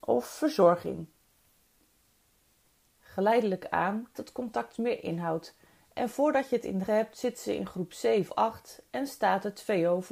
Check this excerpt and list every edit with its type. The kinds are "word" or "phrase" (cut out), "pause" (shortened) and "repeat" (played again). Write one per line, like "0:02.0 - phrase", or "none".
0:04.2 - word
0:06.9 - word
0:08.3 - word